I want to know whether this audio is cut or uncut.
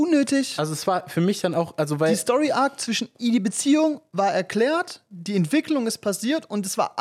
uncut